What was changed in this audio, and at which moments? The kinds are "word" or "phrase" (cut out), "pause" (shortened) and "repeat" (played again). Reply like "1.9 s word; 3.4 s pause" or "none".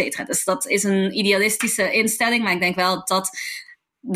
none